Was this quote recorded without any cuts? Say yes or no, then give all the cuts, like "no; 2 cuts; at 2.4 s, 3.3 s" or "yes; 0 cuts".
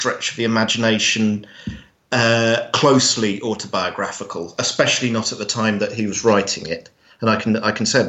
yes; 0 cuts